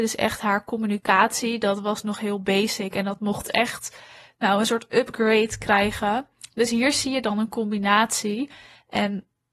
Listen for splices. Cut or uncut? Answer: uncut